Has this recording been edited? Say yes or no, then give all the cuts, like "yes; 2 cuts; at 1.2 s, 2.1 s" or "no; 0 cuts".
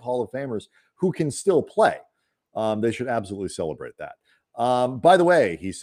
no; 0 cuts